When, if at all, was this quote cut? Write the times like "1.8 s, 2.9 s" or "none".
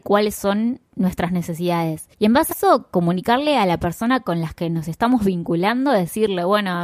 2.5 s